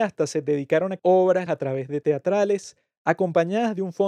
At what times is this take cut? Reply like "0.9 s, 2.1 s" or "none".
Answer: 1.0 s, 1.5 s, 2.0 s